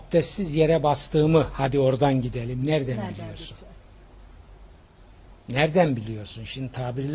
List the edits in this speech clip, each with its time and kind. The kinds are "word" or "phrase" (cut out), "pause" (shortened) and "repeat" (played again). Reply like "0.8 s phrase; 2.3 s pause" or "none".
none